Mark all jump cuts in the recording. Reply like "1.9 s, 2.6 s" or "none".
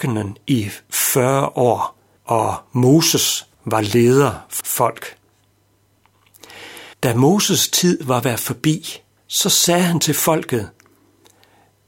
2.2 s, 3.5 s, 4.6 s, 6.9 s, 8.2 s, 9.2 s